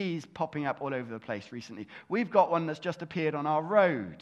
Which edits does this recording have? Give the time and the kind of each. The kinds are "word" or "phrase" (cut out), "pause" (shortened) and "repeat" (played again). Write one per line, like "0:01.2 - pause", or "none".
none